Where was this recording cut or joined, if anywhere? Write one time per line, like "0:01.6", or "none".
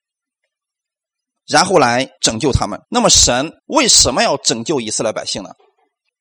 0:02.2
0:02.8
0:03.6